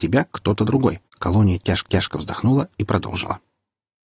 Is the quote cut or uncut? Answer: cut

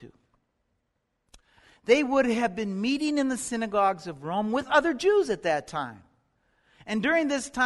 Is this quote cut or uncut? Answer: uncut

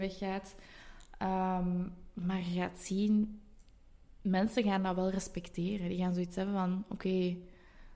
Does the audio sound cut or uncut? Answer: uncut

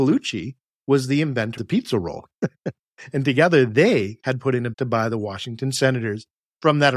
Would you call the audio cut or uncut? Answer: cut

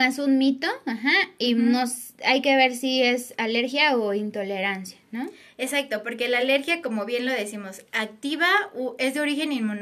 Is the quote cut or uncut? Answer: uncut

